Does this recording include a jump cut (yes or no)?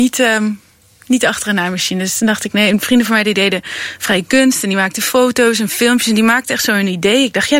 no